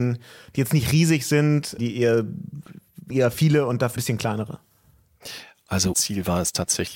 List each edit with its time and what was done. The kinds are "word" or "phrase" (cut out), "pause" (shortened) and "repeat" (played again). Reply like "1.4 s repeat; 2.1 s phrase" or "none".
1.8 s word; 3.1 s word; 4.0 s word; 5.9 s word